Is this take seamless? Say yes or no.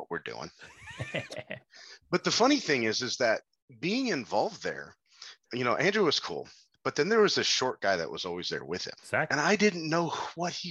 no